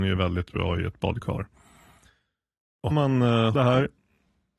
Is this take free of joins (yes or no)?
no